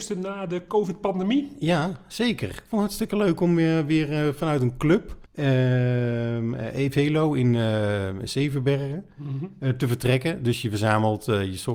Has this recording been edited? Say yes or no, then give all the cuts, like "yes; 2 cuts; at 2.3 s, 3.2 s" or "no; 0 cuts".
yes; 1 cut; at 5.3 s